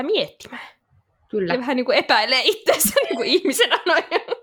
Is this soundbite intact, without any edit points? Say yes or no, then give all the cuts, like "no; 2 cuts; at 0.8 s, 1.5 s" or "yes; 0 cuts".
yes; 0 cuts